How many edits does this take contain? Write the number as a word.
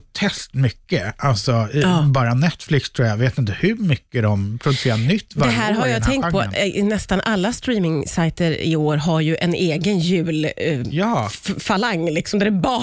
zero